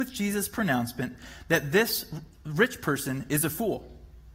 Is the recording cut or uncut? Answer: uncut